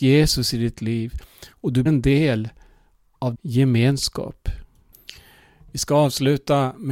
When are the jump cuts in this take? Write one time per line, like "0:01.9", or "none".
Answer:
0:01.9
0:03.3